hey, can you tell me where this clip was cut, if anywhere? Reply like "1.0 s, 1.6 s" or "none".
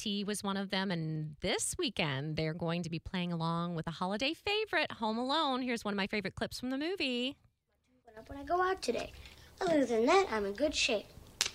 none